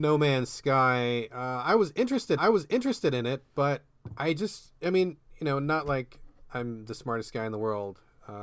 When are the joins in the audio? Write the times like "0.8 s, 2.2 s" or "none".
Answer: 2.4 s